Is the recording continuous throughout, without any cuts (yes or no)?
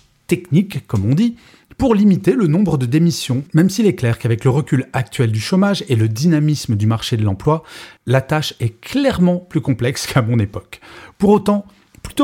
yes